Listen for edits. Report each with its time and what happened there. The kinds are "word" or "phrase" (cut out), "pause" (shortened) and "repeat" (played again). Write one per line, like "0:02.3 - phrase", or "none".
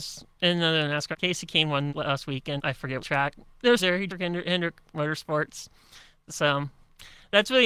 0:01.1 - word
0:01.9 - word
0:02.6 - word
0:03.0 - word
0:03.8 - word
0:04.1 - word